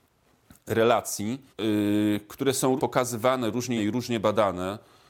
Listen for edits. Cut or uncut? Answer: cut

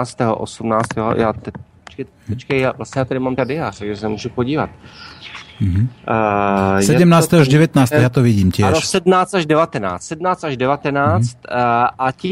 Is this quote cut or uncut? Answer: cut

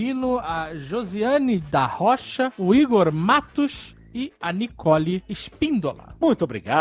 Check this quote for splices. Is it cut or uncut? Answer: uncut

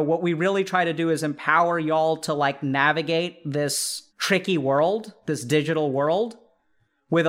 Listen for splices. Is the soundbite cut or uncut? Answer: cut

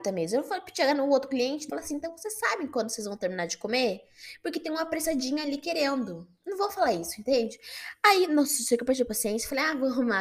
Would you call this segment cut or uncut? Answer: cut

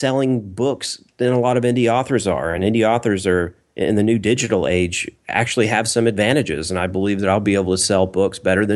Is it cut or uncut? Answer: uncut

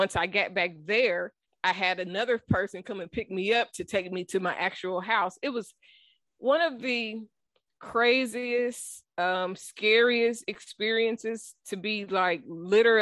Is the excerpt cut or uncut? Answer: uncut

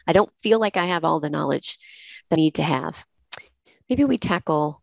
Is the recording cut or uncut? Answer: cut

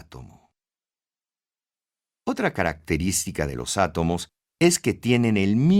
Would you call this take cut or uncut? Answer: uncut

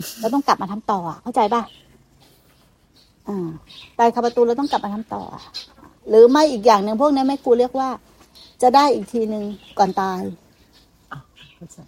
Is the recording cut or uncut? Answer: uncut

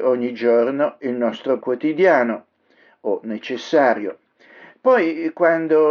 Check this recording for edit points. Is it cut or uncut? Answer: cut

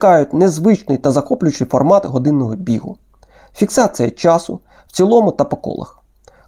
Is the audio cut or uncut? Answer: uncut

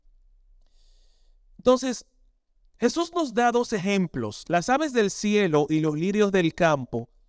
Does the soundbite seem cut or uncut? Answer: uncut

